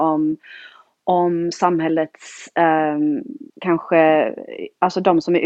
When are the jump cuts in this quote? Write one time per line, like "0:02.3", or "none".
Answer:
0:03.5